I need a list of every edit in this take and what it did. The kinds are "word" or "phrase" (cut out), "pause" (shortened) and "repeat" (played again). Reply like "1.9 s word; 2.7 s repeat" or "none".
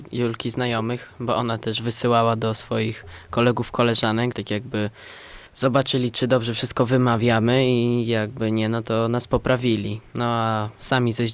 4.3 s word; 5.5 s pause